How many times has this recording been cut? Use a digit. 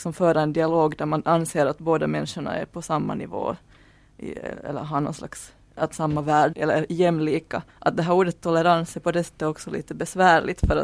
3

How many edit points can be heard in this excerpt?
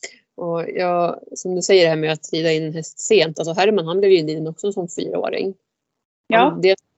0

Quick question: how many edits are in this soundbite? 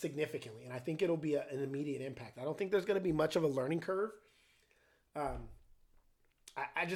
0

